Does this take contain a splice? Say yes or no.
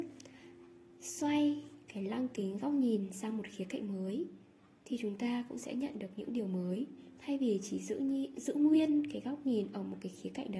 no